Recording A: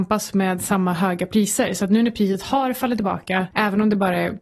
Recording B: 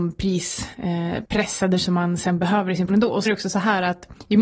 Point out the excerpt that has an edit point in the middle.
B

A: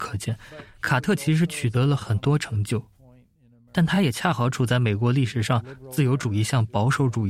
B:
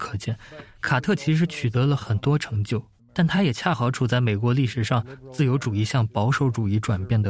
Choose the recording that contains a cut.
B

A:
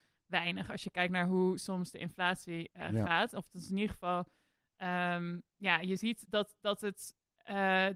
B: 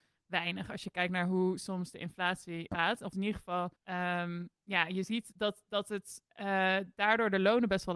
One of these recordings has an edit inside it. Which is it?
B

